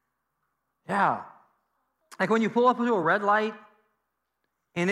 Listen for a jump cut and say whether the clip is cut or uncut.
uncut